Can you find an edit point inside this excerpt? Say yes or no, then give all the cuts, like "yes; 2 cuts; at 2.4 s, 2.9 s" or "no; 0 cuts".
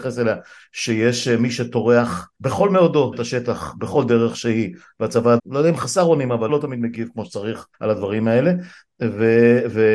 yes; 5 cuts; at 2.3 s, 3.1 s, 5.4 s, 6.5 s, 7.7 s